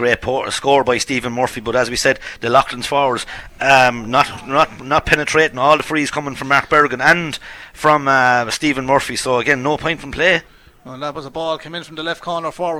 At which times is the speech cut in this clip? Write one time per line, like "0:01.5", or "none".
none